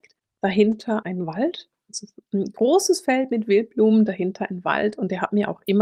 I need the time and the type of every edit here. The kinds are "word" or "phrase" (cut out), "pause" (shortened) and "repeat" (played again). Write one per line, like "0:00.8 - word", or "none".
0:01.0 - word